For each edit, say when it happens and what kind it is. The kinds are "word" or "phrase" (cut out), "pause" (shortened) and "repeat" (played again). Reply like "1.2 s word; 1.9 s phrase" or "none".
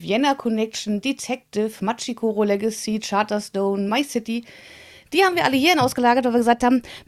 none